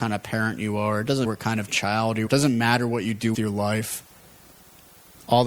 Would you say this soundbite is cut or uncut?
cut